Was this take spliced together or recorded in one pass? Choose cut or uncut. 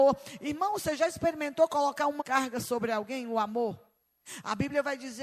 cut